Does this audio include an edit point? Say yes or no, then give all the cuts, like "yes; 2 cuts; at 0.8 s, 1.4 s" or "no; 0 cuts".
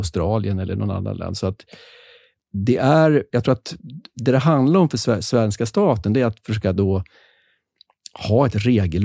no; 0 cuts